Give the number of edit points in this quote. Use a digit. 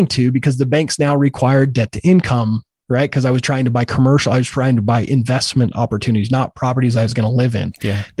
0